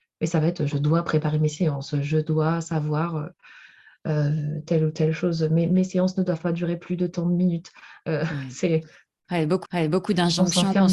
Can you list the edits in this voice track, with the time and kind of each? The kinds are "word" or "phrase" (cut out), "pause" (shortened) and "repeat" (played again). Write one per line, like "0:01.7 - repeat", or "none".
0:09.6 - repeat